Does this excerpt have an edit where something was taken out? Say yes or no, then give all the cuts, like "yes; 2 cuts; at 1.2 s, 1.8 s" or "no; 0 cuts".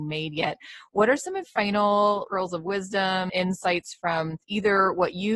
yes; 4 cuts; at 1.4 s, 2.3 s, 3.3 s, 4.4 s